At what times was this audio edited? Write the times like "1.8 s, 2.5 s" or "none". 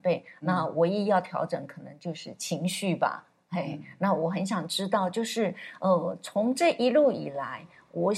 none